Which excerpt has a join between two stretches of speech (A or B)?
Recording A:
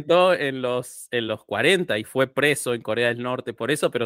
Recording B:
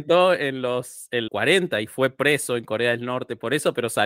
B